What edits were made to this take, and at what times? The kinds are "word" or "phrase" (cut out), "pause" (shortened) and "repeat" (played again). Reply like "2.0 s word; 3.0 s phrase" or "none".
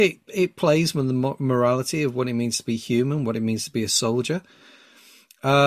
none